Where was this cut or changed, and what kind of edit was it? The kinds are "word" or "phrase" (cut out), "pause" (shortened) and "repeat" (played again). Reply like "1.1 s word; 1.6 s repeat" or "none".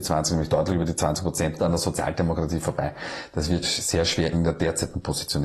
1.6 s word; 3.6 s word; 4.3 s word